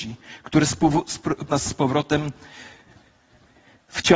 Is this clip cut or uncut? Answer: cut